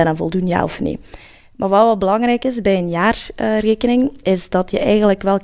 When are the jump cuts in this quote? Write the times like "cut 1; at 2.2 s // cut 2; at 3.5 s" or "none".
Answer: none